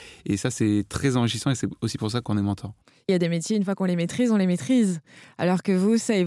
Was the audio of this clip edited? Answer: no; 0 cuts

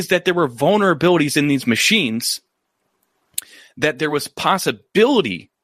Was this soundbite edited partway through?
no; 0 cuts

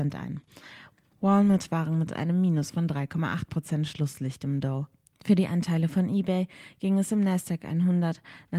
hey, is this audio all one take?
yes; 0 cuts

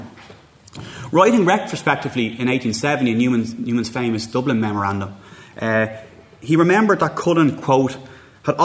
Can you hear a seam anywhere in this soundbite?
no; 0 cuts

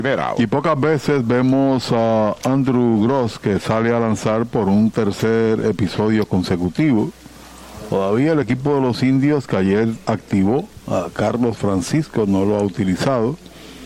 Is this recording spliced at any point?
no; 0 cuts

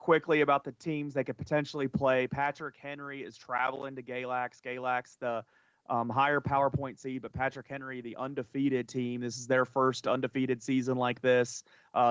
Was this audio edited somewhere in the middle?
no; 0 cuts

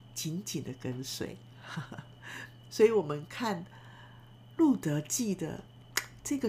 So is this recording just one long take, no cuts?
yes; 0 cuts

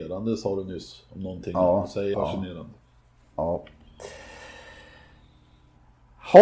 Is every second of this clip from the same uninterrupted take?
no; 1 cut; at 2.1 s

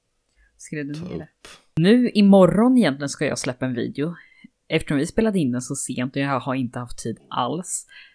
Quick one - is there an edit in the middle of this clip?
no; 0 cuts

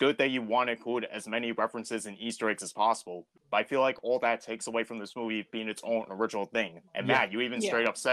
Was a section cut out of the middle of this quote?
yes; 1 cut; at 6.9 s

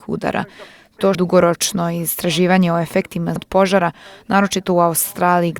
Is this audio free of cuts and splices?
no; 2 cuts; at 1.1 s, 3.4 s

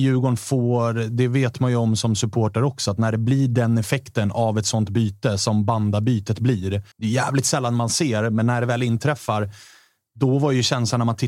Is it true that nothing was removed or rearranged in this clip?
no; 1 cut; at 6.9 s

